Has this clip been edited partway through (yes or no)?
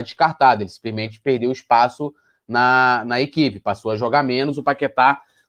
no